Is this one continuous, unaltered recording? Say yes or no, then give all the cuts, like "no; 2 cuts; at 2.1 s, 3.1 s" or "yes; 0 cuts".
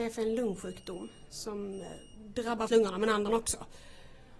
no; 2 cuts; at 2.7 s, 3.3 s